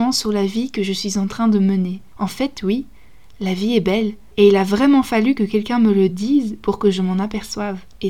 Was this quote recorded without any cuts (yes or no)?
yes